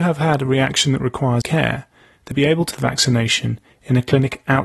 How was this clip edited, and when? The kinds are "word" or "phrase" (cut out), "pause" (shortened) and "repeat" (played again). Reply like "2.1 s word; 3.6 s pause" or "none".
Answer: 1.4 s word; 2.3 s word; 2.7 s word

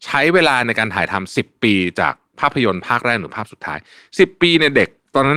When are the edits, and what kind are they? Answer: none

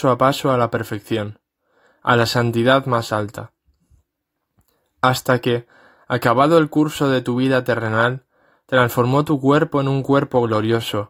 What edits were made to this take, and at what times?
none

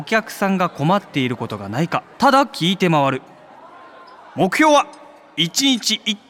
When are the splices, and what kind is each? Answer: 2.1 s pause

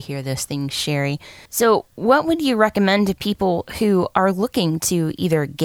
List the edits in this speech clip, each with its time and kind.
1.5 s pause

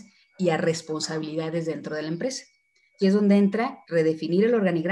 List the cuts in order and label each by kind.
3.0 s word; 3.8 s pause

